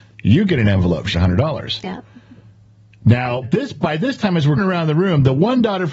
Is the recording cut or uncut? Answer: cut